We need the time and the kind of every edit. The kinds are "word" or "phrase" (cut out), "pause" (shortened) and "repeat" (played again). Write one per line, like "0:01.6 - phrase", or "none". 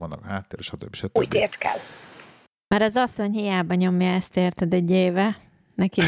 none